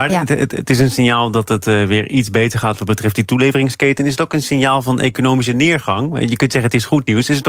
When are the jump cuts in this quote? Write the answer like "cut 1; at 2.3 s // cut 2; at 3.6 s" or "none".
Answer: none